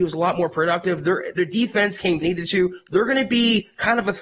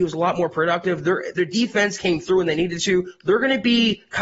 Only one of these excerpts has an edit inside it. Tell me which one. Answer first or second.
first